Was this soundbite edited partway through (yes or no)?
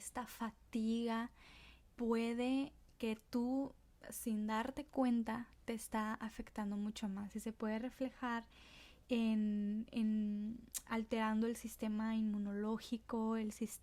yes